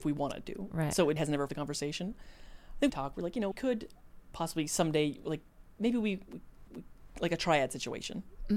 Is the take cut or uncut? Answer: cut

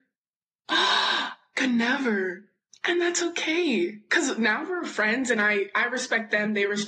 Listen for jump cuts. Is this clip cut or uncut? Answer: uncut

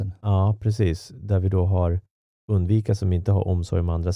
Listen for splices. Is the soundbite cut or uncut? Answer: uncut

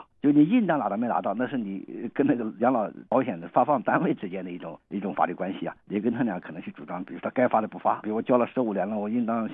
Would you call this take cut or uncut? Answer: cut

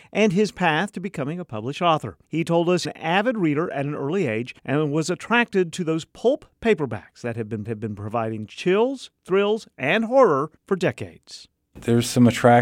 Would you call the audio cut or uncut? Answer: cut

